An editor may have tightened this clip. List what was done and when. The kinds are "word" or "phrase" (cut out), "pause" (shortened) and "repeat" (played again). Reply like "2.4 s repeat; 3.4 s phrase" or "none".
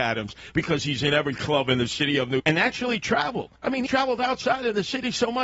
2.4 s word; 3.6 s pause; 3.9 s word